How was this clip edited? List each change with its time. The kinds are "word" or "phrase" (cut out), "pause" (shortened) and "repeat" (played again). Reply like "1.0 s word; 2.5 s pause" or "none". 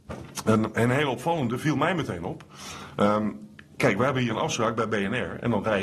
none